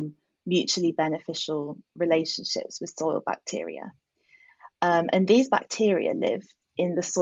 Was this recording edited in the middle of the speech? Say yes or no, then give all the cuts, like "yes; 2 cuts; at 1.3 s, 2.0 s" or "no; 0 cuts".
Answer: no; 0 cuts